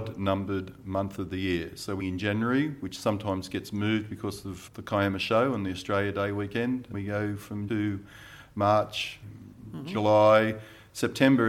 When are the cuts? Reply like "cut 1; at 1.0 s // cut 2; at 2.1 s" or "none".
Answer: cut 1; at 2.0 s // cut 2; at 4.7 s // cut 3; at 6.9 s // cut 4; at 7.7 s // cut 5; at 9.2 s